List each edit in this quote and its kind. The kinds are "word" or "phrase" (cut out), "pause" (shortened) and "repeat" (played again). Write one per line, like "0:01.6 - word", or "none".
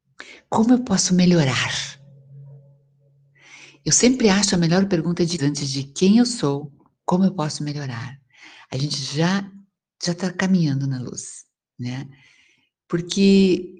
0:05.4 - word